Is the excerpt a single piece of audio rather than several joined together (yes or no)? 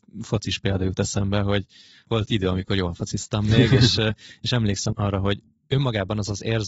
no